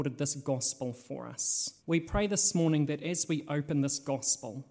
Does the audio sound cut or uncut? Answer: cut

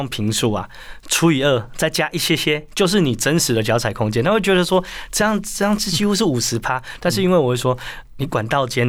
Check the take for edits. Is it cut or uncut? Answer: uncut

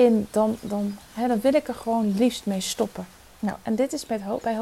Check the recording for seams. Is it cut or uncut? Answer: uncut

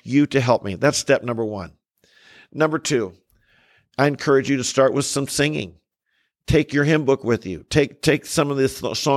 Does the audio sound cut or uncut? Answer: uncut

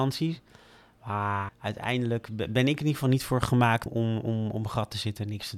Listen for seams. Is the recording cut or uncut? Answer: cut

